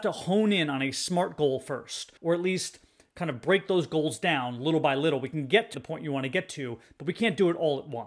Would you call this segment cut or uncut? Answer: cut